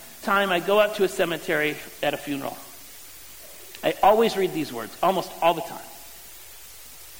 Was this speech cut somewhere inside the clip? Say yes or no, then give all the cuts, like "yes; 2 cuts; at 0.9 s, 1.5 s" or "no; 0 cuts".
no; 0 cuts